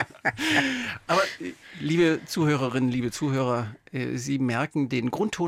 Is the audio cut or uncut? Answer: uncut